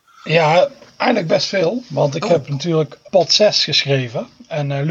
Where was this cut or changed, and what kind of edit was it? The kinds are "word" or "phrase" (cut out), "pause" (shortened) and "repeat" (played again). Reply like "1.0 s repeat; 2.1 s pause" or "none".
3.1 s word

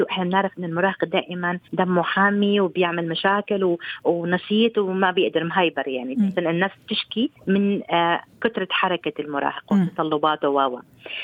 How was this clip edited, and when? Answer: 1.6 s pause; 6.3 s phrase; 7.4 s pause

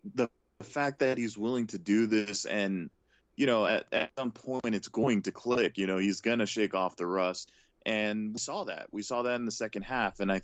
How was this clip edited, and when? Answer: none

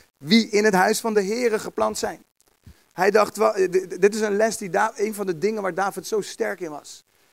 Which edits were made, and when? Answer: none

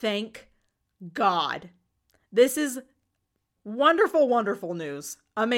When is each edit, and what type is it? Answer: 3.6 s word

